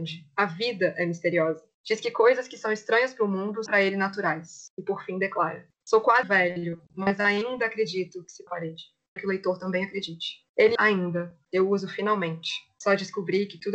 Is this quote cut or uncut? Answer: cut